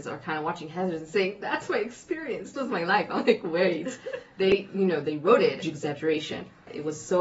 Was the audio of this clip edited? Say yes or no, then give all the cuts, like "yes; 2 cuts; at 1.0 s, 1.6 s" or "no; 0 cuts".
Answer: yes; 2 cuts; at 2.5 s, 5.6 s